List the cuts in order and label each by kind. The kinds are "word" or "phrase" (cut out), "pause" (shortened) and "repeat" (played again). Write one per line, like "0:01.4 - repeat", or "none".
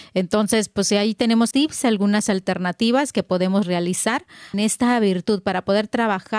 0:01.5 - word
0:04.5 - phrase

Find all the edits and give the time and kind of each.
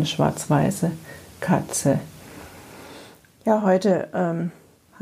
none

